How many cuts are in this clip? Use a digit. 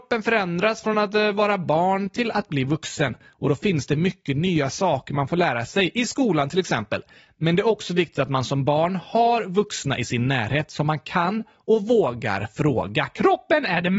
0